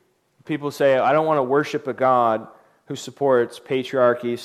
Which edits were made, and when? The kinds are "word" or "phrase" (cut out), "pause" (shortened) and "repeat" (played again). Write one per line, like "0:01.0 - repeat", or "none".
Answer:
none